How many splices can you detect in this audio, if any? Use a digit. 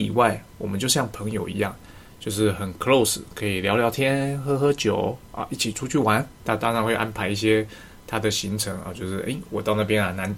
1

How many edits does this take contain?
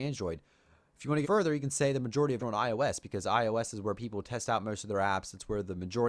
2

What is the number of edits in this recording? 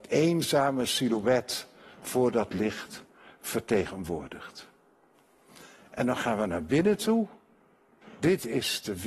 0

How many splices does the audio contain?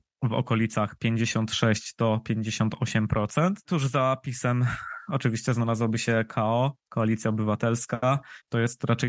0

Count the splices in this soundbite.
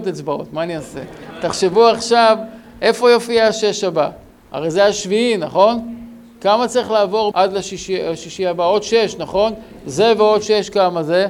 1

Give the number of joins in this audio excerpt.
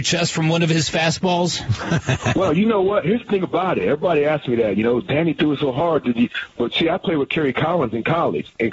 0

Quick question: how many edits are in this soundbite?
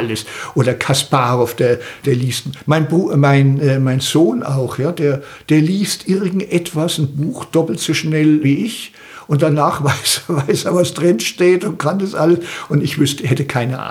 2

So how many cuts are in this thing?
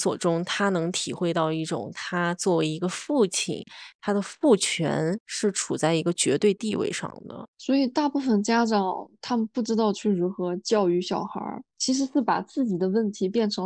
2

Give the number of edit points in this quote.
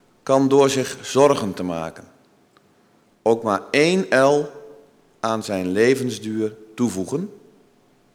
0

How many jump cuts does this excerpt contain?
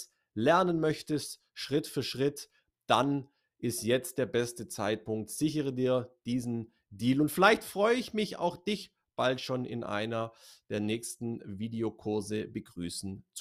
0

